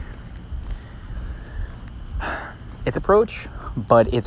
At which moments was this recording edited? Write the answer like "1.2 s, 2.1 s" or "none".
2.9 s